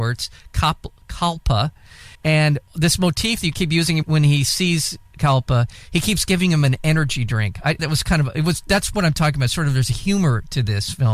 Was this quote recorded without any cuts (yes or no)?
no